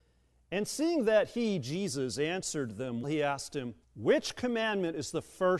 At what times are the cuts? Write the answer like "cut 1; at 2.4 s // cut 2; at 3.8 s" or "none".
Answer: cut 1; at 3.0 s // cut 2; at 3.8 s